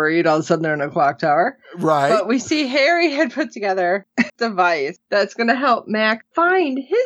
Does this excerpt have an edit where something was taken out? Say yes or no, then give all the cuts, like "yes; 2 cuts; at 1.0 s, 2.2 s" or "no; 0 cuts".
yes; 1 cut; at 4.3 s